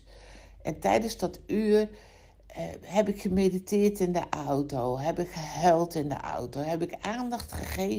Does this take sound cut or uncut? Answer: uncut